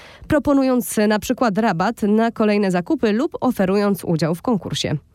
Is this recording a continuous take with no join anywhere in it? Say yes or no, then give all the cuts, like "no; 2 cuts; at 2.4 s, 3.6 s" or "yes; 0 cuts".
yes; 0 cuts